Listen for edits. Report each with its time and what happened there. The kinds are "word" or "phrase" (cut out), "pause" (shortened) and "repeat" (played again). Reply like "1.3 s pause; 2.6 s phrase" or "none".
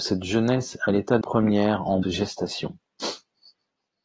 1.2 s word; 2.0 s word